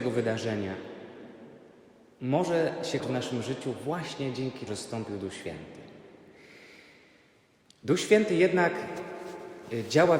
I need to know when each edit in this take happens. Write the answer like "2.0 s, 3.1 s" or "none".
3.0 s, 4.7 s